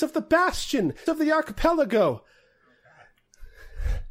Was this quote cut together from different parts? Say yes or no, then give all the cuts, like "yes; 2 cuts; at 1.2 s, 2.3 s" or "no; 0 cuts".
yes; 1 cut; at 1.1 s